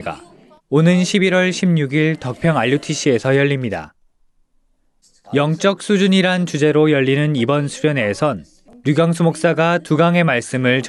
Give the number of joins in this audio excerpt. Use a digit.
0